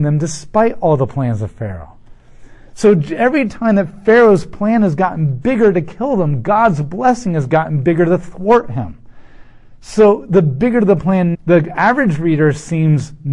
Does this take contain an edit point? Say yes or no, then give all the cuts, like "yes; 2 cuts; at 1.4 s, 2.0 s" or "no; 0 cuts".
yes; 1 cut; at 11.3 s